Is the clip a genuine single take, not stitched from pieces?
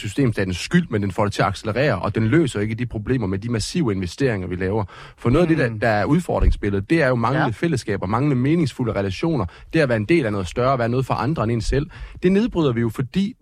yes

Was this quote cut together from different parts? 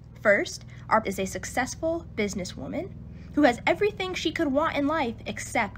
yes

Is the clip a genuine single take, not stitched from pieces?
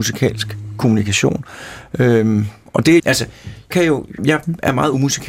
no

